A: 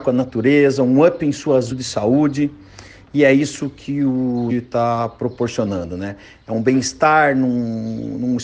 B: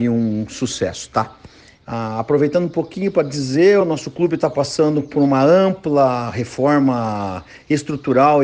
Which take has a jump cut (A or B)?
A